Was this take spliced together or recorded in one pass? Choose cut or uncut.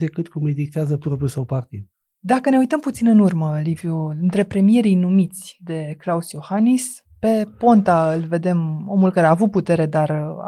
uncut